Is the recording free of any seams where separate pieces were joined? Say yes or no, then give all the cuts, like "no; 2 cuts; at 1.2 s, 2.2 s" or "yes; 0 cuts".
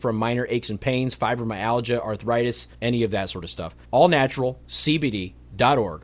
no; 2 cuts; at 2.7 s, 3.8 s